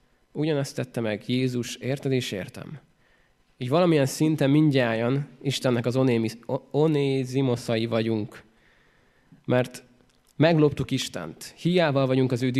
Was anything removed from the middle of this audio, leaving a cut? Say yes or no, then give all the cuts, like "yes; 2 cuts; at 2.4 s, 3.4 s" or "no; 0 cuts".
no; 0 cuts